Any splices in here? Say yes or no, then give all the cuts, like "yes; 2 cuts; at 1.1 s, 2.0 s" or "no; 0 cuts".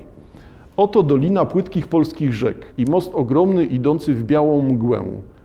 yes; 1 cut; at 2.7 s